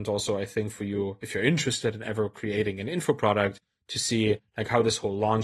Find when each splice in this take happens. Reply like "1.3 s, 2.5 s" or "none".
none